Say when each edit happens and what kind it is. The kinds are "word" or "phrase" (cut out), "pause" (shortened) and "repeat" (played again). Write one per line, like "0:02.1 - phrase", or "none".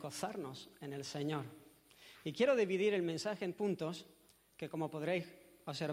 0:03.5 - word